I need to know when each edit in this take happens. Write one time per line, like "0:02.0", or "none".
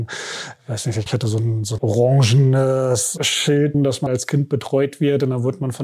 0:01.1
0:01.8
0:03.7
0:04.1